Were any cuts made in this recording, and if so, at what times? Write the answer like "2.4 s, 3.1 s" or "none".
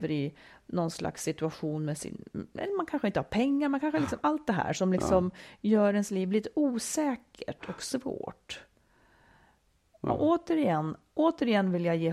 none